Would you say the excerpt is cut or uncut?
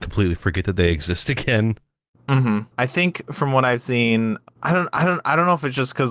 cut